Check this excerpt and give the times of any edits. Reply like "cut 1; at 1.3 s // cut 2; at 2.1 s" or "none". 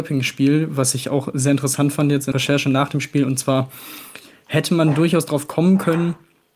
cut 1; at 2.3 s